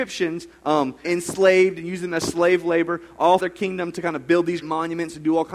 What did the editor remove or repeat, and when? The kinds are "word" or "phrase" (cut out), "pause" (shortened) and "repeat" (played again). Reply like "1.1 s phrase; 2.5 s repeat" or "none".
1.0 s word; 3.4 s word; 4.6 s word